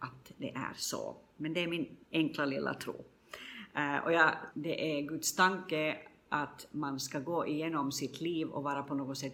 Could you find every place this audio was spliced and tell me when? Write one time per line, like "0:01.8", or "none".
0:02.0
0:04.5